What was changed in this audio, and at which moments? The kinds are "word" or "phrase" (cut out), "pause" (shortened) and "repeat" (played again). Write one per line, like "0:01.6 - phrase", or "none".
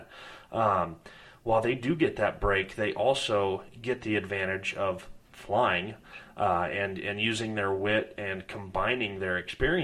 0:05.2 - pause

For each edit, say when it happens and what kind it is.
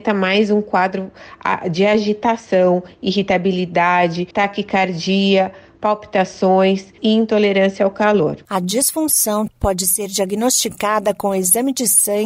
0:04.3 - pause
0:07.0 - word
0:08.4 - pause
0:09.5 - word

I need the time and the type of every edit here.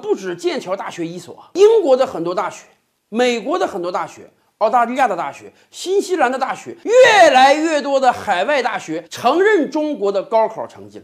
0:09.0 - pause

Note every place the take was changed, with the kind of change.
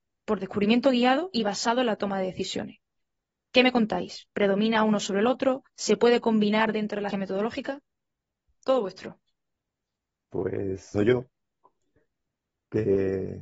0:05.7 - pause
0:07.1 - word
0:10.9 - phrase

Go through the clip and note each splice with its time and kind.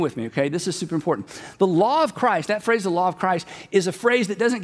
none

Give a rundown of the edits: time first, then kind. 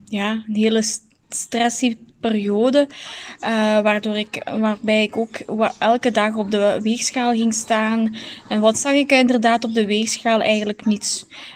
none

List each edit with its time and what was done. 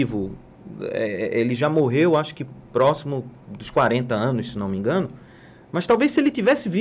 none

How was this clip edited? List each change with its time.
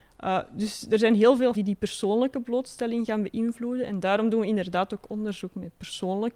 0:01.5 - word

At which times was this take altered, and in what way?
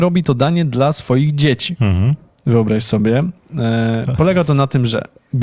none

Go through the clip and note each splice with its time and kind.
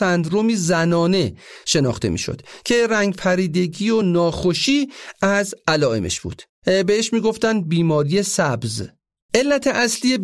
none

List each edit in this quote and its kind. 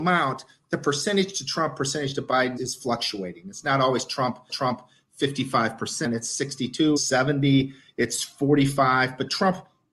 0:02.6 - word
0:04.5 - repeat
0:07.0 - word

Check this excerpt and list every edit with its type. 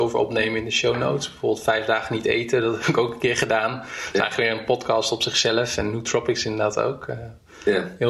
none

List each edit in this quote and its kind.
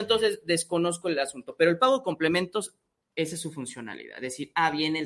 none

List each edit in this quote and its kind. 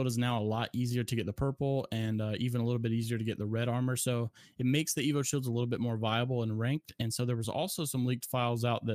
none

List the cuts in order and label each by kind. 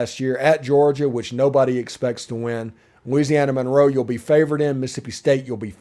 none

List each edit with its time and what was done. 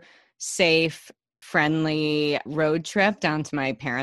0:01.4 - word
0:02.5 - word

